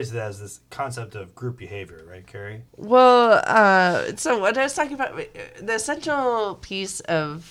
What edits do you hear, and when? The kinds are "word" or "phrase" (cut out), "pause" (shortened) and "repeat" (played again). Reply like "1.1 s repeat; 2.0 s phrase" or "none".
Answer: 2.7 s pause